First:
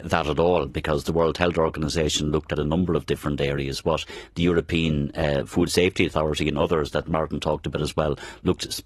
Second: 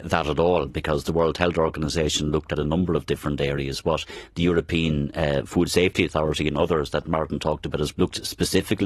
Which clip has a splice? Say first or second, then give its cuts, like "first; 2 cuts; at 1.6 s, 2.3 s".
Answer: second; 1 cut; at 7.9 s